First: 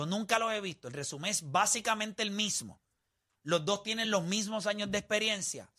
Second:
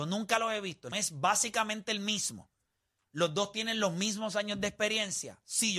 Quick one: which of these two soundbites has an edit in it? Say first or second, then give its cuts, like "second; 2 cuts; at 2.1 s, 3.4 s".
second; 1 cut; at 0.9 s